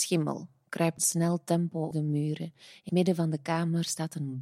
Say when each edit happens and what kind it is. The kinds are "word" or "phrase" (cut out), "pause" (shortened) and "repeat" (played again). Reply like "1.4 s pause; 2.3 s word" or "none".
1.0 s word; 1.9 s word; 2.9 s word